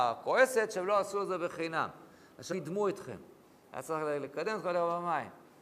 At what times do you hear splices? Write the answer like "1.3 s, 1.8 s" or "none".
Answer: 2.5 s